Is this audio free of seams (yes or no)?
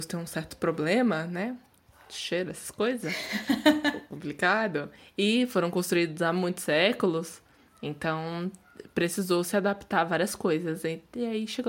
yes